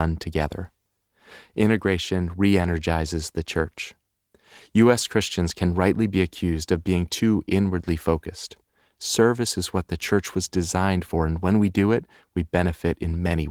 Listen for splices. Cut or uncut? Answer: uncut